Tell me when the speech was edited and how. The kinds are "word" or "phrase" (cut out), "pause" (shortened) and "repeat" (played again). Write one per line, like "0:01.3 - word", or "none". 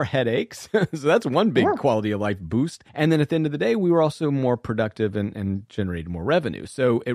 0:02.9 - pause